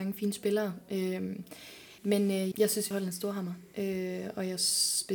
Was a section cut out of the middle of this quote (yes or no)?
yes